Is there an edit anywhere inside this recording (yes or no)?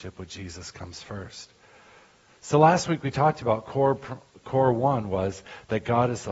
no